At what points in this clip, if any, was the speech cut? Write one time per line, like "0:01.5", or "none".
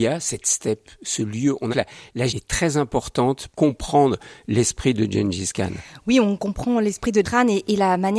0:01.7
0:02.3
0:03.5
0:07.2